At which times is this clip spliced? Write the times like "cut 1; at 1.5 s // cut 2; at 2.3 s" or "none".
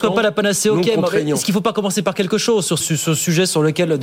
cut 1; at 2.8 s